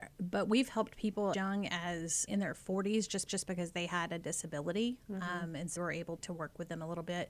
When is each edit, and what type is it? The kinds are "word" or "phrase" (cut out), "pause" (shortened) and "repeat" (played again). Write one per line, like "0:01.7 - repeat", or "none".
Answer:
0:01.3 - word
0:02.3 - word
0:03.3 - repeat
0:05.8 - word
0:06.2 - word